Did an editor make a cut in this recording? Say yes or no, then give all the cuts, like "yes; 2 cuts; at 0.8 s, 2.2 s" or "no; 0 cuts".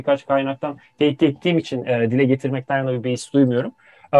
no; 0 cuts